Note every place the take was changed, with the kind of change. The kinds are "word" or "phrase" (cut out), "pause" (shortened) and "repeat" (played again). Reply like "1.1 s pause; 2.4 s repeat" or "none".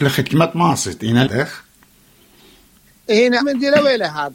1.2 s word; 3.4 s word